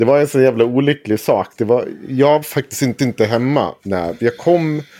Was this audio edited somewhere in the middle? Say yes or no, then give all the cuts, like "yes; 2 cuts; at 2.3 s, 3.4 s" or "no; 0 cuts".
yes; 2 cuts; at 2.4 s, 3.0 s